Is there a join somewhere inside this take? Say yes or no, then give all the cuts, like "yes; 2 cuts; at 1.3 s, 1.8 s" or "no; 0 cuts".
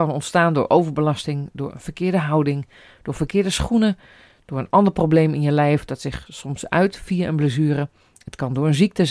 no; 0 cuts